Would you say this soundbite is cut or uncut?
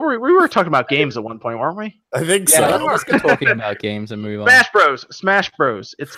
cut